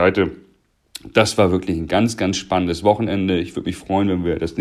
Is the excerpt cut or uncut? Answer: uncut